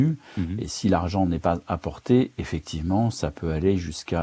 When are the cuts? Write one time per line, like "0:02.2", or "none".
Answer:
none